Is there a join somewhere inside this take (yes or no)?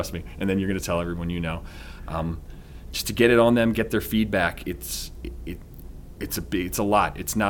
no